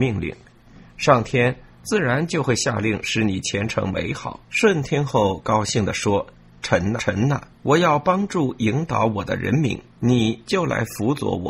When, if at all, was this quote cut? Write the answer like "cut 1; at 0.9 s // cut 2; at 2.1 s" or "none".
cut 1; at 4.4 s // cut 2; at 7.0 s // cut 3; at 7.5 s // cut 4; at 9.9 s